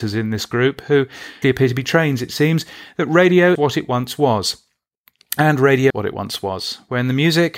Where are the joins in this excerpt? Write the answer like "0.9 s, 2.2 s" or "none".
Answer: 1.4 s, 1.8 s, 3.5 s, 5.9 s